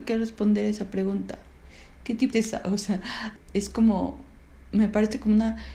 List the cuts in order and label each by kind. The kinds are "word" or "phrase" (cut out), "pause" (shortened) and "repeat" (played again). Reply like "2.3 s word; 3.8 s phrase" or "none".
2.3 s phrase; 3.4 s phrase